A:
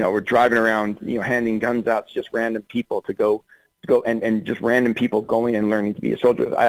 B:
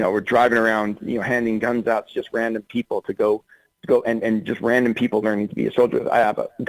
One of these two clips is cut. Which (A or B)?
B